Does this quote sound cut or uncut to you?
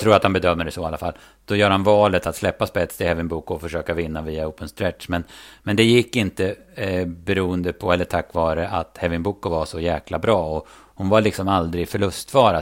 uncut